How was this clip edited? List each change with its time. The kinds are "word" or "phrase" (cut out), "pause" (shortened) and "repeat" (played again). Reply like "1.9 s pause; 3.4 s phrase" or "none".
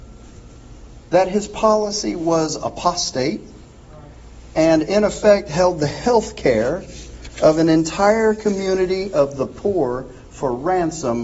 none